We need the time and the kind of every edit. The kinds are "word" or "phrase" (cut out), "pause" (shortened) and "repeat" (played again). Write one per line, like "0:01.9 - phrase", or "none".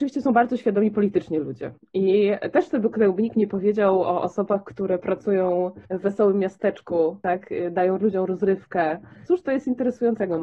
0:01.8 - pause
0:05.8 - pause